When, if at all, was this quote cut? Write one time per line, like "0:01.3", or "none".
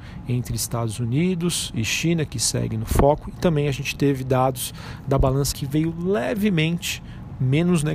0:05.5